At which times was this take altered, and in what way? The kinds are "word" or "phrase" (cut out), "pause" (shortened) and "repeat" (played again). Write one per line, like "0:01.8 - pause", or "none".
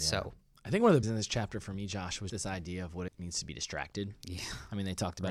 0:01.0 - phrase
0:02.3 - word
0:03.1 - word